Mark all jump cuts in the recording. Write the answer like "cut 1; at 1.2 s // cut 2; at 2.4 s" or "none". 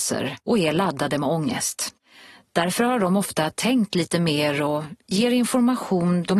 none